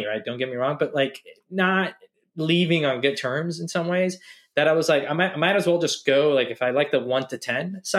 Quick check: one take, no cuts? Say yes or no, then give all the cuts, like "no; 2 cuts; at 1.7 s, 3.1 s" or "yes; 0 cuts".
yes; 0 cuts